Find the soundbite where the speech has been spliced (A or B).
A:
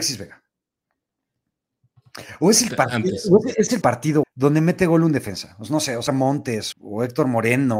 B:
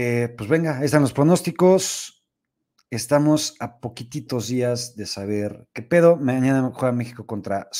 A